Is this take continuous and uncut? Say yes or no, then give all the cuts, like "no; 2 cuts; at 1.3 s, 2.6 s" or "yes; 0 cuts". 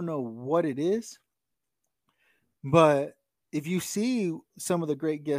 no; 1 cut; at 3.3 s